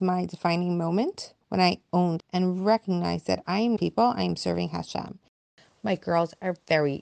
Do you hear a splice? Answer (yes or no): yes